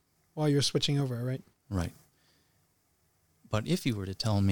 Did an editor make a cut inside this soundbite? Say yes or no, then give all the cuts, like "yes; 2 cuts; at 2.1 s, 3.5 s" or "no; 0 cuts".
no; 0 cuts